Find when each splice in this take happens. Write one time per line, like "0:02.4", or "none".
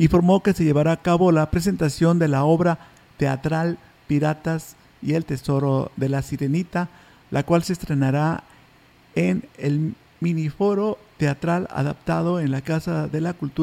0:09.5